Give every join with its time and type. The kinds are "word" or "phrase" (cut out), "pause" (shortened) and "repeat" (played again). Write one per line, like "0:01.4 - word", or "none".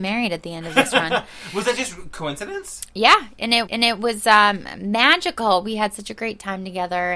0:03.7 - repeat